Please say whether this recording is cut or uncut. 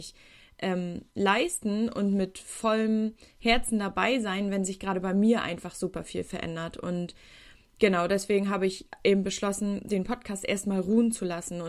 uncut